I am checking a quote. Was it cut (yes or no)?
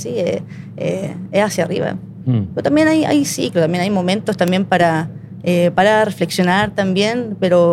no